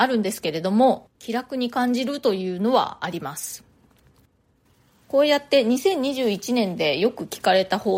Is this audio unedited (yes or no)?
no